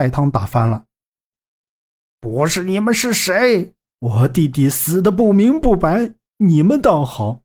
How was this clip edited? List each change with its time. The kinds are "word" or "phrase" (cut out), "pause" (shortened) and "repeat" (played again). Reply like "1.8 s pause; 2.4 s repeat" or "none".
none